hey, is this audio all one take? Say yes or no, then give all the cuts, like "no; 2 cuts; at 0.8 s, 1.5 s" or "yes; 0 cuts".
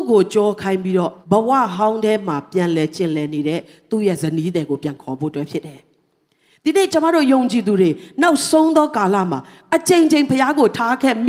no; 1 cut; at 1.2 s